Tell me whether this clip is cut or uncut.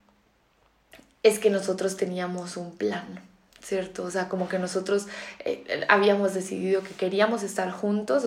uncut